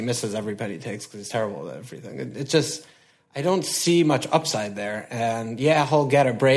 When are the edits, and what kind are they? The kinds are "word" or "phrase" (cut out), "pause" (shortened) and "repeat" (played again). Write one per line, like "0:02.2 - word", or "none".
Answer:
none